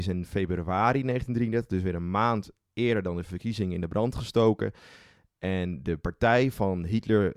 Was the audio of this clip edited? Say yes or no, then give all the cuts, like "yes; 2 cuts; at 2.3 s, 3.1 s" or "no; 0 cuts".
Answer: no; 0 cuts